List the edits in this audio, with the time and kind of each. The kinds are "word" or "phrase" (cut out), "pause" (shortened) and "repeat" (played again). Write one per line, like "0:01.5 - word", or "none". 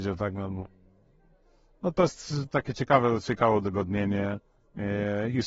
none